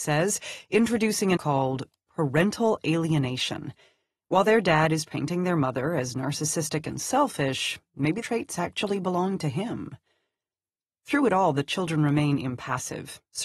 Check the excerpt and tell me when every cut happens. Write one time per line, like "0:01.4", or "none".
0:01.4
0:08.2

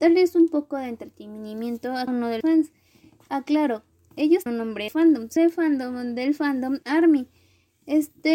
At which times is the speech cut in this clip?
0:02.1
0:02.4
0:04.1
0:04.5
0:04.9
0:05.4
0:06.8

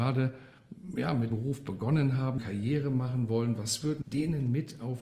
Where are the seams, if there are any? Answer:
0:01.3
0:02.4
0:04.0

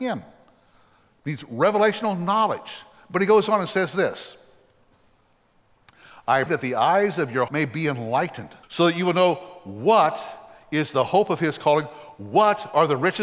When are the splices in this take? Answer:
0:06.5
0:07.5
0:08.6

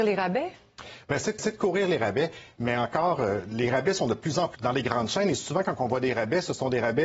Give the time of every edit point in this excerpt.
0:01.4
0:04.5

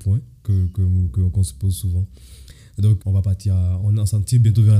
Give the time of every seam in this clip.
0:03.0
0:03.8

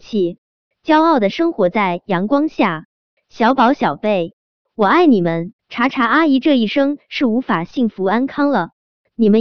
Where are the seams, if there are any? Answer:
0:05.6

